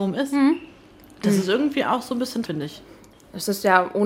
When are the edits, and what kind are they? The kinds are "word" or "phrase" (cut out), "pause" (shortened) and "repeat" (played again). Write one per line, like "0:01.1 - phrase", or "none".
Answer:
0:02.5 - word